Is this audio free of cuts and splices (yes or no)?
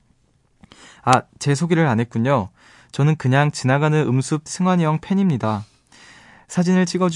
no